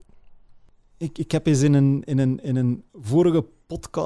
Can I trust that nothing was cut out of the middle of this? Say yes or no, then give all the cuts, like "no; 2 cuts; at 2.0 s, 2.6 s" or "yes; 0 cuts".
yes; 0 cuts